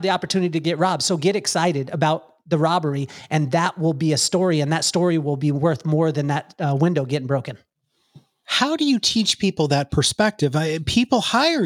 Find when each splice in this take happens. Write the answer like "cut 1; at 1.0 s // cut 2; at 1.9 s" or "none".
none